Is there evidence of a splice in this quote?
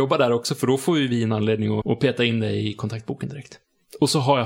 yes; 1 cut; at 1.8 s

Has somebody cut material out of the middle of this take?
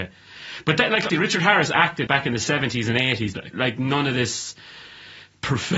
yes; 3 cuts; at 1.1 s, 2.1 s, 3.5 s

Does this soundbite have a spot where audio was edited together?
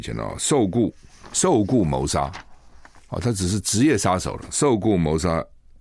no; 0 cuts

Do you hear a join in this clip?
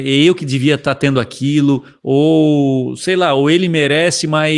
no; 0 cuts

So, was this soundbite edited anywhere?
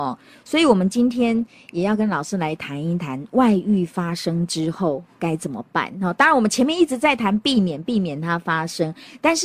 no; 0 cuts

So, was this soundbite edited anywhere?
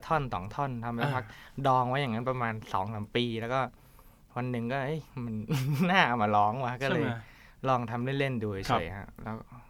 no; 0 cuts

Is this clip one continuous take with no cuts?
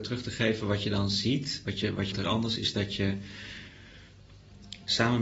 no; 2 cuts; at 2.1 s, 2.6 s

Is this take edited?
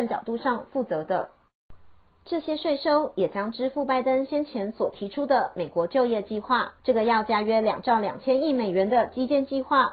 yes; 1 cut; at 6.8 s

